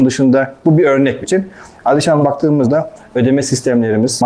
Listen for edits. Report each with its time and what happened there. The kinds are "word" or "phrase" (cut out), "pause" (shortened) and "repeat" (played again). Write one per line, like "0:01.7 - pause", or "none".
0:01.2 - word
0:02.2 - word
0:02.6 - word